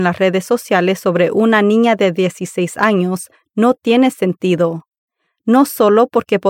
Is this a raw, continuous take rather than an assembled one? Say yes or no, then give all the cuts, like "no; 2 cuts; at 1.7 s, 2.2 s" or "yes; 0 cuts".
yes; 0 cuts